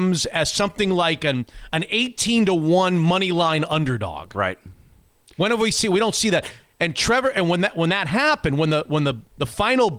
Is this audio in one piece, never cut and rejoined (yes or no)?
yes